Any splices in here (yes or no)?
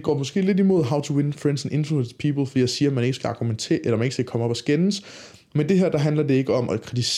no